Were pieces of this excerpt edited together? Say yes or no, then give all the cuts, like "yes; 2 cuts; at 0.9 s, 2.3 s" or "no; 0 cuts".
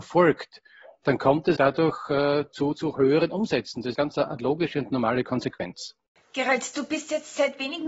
yes; 2 cuts; at 1.6 s, 3.9 s